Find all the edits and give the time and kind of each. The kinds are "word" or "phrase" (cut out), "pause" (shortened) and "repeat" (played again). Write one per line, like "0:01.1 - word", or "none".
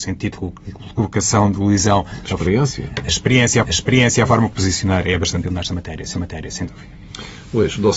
0:03.6 - repeat
0:04.5 - phrase
0:05.4 - word
0:06.1 - repeat